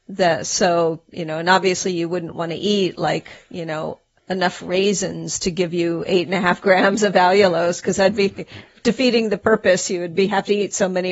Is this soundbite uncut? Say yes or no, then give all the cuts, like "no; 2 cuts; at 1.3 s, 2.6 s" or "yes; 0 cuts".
no; 1 cut; at 4.2 s